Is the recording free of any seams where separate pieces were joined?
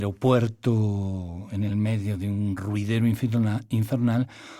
yes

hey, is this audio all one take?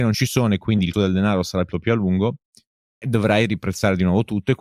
no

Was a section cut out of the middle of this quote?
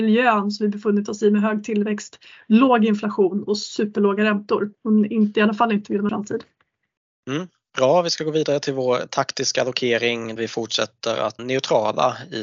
yes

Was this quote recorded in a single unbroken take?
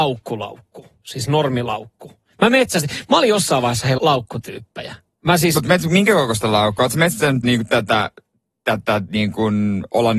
no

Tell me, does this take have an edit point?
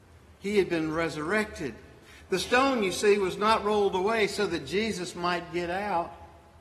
no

